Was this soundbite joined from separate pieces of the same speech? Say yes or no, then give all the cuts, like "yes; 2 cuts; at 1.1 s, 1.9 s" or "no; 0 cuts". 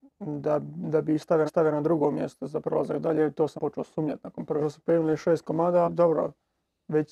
yes; 4 cuts; at 1.5 s, 3.6 s, 4.6 s, 5.8 s